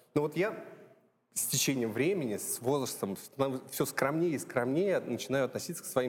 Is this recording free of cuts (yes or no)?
yes